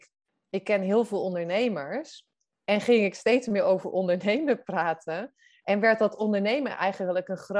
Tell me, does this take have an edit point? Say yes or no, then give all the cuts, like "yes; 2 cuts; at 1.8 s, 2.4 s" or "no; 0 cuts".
no; 0 cuts